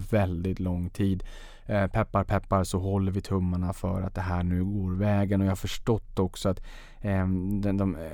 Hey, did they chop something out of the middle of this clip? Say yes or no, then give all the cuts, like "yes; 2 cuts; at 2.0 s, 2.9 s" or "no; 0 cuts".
no; 0 cuts